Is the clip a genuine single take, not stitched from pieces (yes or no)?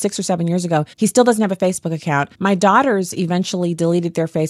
no